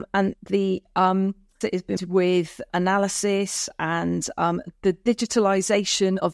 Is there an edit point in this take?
yes; 3 cuts; at 1.6 s, 2.0 s, 2.7 s

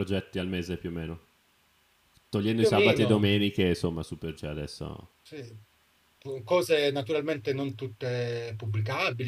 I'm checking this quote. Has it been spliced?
yes; 1 cut; at 4.4 s

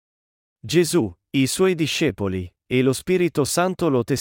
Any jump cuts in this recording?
no; 0 cuts

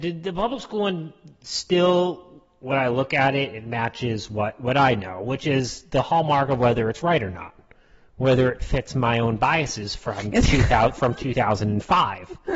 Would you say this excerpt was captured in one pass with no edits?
yes; 0 cuts

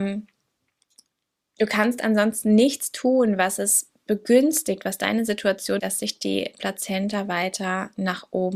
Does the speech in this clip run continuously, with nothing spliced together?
no; 1 cut; at 5.8 s

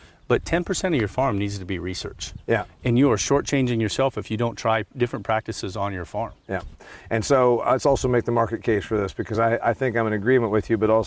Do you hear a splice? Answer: no; 0 cuts

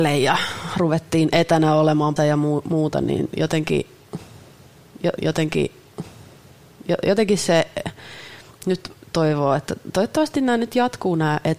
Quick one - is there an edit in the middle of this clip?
yes; 2 cuts; at 2.2 s, 5.2 s

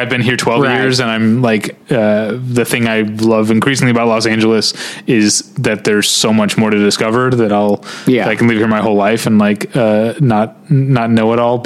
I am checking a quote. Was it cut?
yes; 1 cut; at 1.8 s

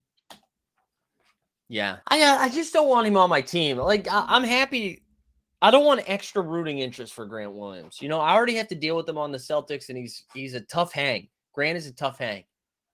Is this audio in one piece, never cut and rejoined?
no; 1 cut; at 2.0 s

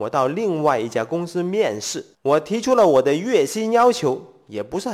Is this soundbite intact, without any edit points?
no; 1 cut; at 2.1 s

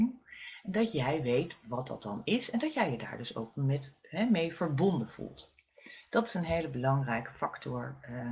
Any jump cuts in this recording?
no; 0 cuts

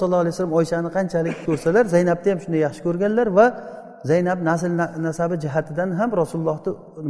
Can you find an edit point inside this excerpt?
yes; 1 cut; at 1.4 s

